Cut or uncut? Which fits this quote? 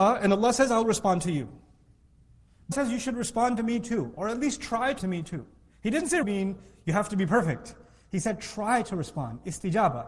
cut